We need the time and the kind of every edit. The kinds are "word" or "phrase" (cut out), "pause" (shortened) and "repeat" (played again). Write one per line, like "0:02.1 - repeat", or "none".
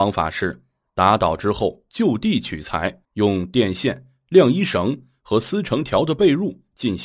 0:03.0 - pause